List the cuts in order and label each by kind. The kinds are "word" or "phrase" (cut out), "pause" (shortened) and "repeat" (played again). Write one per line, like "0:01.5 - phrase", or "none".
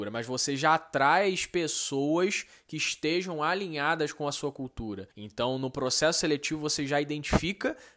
0:05.1 - pause